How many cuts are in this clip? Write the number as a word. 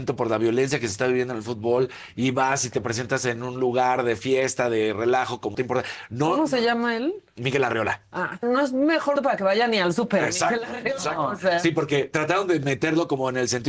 three